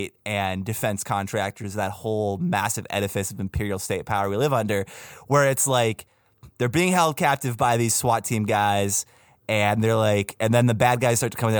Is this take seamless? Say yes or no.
yes